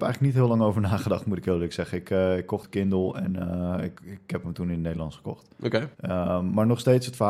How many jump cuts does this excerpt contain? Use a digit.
3